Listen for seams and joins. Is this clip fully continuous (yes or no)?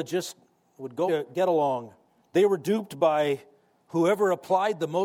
no